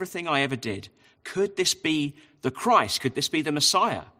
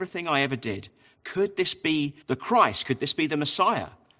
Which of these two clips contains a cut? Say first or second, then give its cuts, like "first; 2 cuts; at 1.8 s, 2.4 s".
second; 1 cut; at 2.2 s